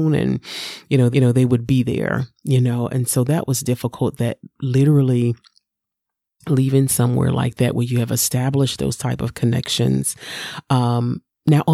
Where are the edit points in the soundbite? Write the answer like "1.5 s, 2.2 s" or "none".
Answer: 1.1 s